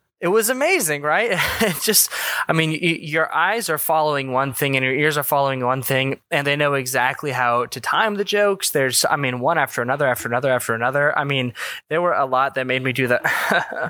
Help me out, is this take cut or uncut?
uncut